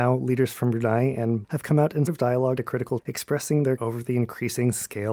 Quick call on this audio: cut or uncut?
cut